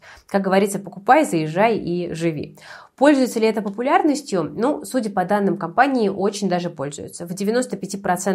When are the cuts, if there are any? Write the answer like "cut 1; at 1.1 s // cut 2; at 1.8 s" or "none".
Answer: none